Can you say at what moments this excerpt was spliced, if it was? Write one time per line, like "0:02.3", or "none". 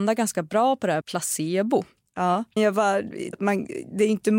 0:01.0
0:02.6
0:03.3

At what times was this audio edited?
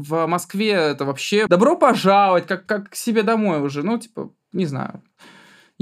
0:01.5

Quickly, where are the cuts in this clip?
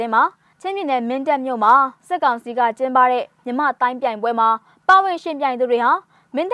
none

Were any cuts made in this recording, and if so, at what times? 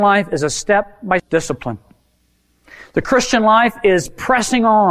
0:01.2

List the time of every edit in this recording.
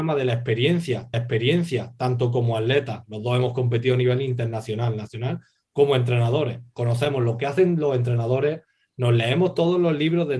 0:01.1

